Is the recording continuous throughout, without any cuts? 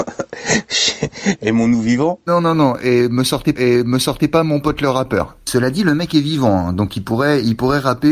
no; 1 cut; at 3.6 s

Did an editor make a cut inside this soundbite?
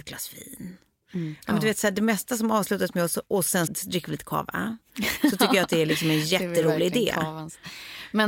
yes; 1 cut; at 3.7 s

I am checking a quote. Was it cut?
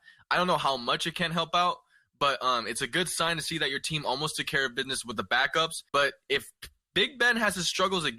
yes; 1 cut; at 5.9 s

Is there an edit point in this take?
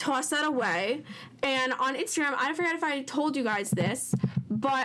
no; 0 cuts

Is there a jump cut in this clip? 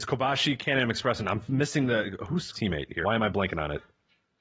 yes; 2 cuts; at 2.5 s, 3.0 s

